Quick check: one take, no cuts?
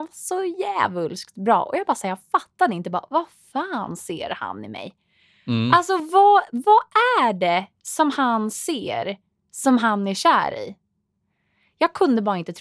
yes; 0 cuts

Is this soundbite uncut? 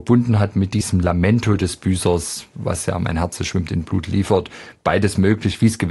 yes; 0 cuts

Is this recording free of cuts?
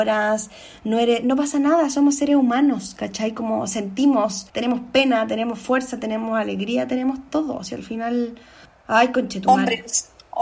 no; 2 cuts; at 4.5 s, 8.6 s

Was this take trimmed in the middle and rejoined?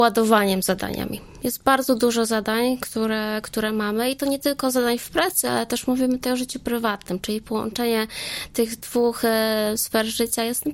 no; 0 cuts

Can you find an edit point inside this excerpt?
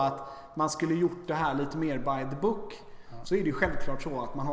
no; 0 cuts

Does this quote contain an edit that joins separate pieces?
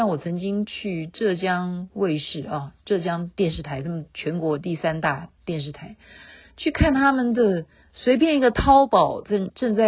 yes; 2 cuts; at 3.3 s, 7.8 s

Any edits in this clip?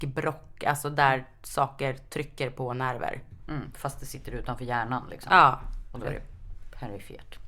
no; 0 cuts

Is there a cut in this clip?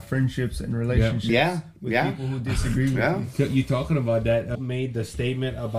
yes; 1 cut; at 4.5 s

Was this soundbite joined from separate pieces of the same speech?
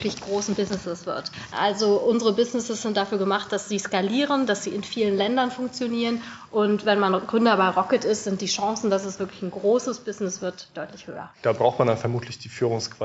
yes; 2 cuts; at 10.7 s, 11.3 s

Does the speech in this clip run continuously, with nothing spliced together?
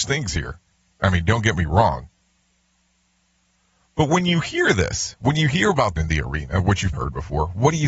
no; 2 cuts; at 6.0 s, 6.9 s

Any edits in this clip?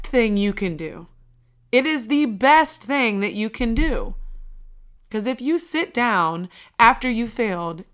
yes; 1 cut; at 5.0 s

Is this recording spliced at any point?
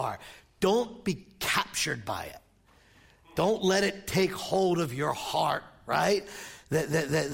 no; 0 cuts

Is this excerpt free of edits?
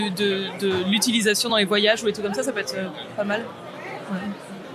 yes; 0 cuts

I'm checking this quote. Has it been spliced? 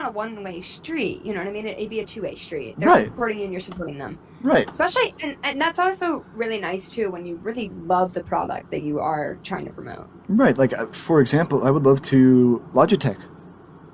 no; 0 cuts

